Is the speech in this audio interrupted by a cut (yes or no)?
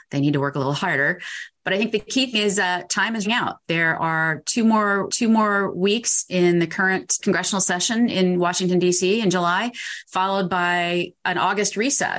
yes